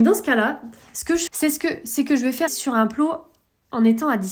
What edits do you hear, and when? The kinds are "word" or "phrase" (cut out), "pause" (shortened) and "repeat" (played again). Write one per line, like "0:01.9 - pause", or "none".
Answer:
0:01.3 - word
0:02.5 - word